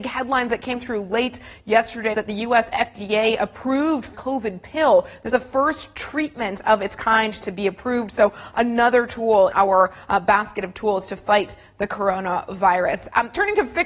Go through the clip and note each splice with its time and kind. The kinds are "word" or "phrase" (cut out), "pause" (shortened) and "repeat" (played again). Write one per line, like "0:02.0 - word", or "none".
0:02.1 - word
0:04.1 - word
0:05.3 - word
0:09.5 - word